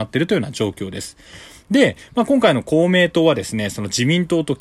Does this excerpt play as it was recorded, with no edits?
yes; 0 cuts

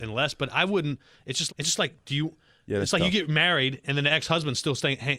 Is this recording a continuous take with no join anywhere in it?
no; 1 cut; at 1.5 s

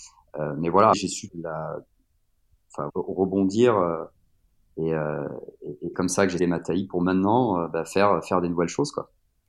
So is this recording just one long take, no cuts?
no; 5 cuts; at 0.9 s, 1.3 s, 2.9 s, 5.9 s, 6.4 s

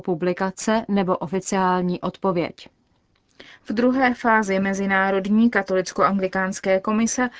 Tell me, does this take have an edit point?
no; 0 cuts

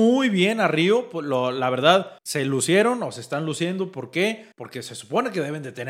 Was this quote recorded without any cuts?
no; 2 cuts; at 2.2 s, 4.5 s

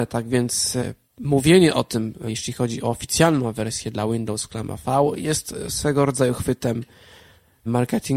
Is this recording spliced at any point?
no; 0 cuts

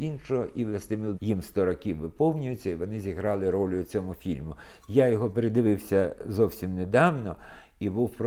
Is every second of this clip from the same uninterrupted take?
no; 1 cut; at 1.1 s

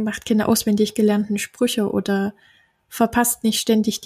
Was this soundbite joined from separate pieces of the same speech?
no; 0 cuts

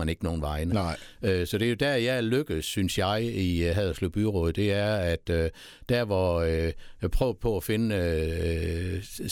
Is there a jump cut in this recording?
no; 0 cuts

